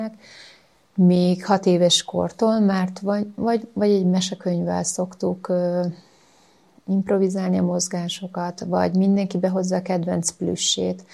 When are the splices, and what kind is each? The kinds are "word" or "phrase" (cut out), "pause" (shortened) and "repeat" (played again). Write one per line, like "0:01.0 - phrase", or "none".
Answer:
none